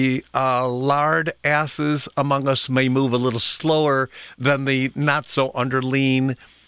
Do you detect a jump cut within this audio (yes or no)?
no